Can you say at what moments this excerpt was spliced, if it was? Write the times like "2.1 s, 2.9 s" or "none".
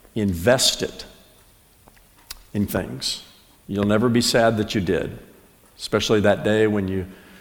2.7 s, 3.5 s

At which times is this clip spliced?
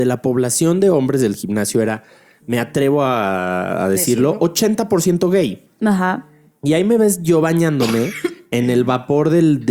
none

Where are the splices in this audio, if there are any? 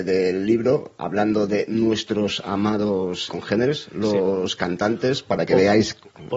3.3 s

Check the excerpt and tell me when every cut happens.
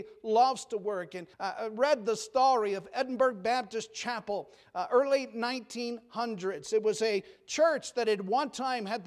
1.3 s

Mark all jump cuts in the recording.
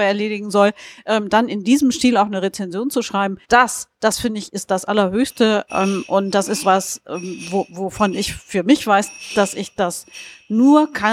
3.4 s, 6.6 s

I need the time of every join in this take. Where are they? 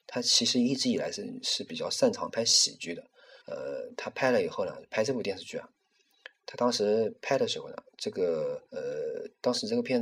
3.4 s, 8.7 s

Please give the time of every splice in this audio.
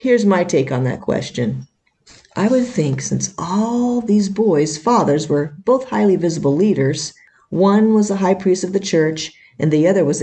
none

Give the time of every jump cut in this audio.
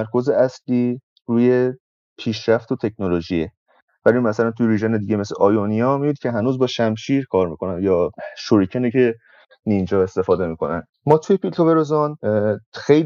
none

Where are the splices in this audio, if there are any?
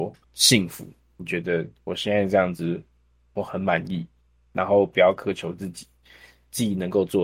none

